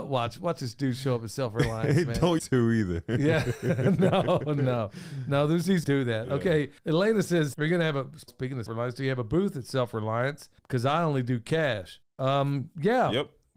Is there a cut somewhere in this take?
yes; 8 cuts; at 2.4 s, 5.8 s, 6.8 s, 7.5 s, 8.3 s, 8.7 s, 10.6 s, 12.0 s

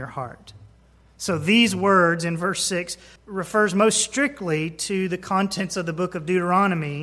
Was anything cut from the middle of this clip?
yes; 1 cut; at 3.2 s

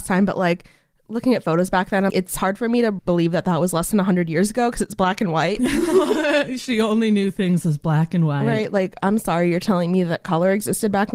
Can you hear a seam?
yes; 1 cut; at 2.1 s

